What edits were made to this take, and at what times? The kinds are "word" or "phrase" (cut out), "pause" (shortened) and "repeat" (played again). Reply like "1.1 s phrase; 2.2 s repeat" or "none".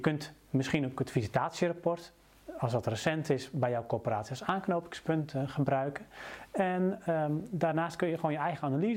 none